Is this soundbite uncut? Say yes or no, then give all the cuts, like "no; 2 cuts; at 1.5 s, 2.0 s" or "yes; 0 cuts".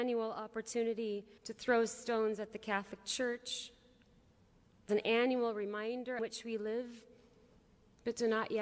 no; 3 cuts; at 1.4 s, 4.9 s, 6.2 s